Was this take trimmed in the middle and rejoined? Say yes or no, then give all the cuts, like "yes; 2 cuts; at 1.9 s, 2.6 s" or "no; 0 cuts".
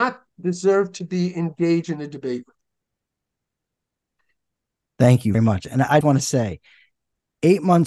yes; 2 cuts; at 5.3 s, 6.0 s